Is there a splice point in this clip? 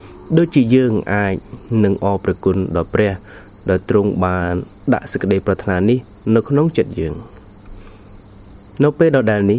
no; 0 cuts

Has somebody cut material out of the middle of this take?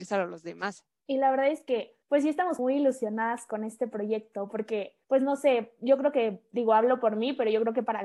yes; 3 cuts; at 2.0 s, 2.6 s, 5.0 s

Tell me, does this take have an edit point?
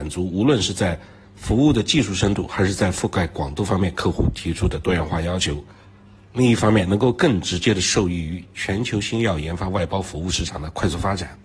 no; 0 cuts

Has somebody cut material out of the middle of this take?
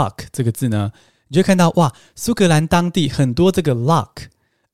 no; 0 cuts

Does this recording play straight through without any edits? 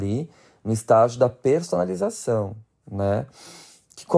yes; 0 cuts

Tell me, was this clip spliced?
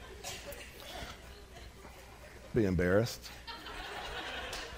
yes; 1 cut; at 2.5 s

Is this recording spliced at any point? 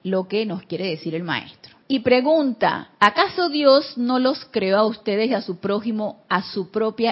yes; 1 cut; at 1.8 s

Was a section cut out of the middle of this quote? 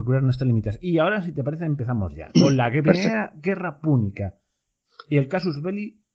no; 0 cuts

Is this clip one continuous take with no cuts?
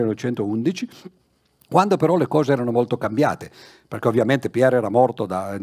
yes; 0 cuts

